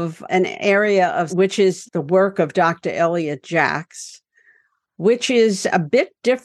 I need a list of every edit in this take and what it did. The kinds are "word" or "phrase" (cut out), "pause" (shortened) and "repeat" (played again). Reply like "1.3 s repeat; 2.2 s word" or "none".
1.3 s phrase